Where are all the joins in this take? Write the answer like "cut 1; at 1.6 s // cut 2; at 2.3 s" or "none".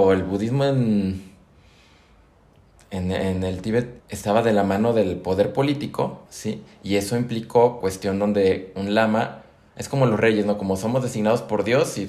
cut 1; at 4.0 s // cut 2; at 6.3 s // cut 3; at 7.8 s